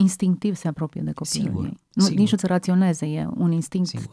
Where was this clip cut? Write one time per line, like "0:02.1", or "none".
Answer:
0:02.4